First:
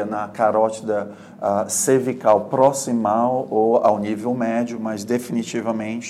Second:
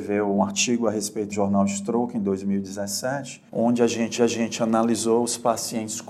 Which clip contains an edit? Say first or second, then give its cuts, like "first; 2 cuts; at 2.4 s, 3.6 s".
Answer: second; 3 cuts; at 1.3 s, 3.5 s, 4.2 s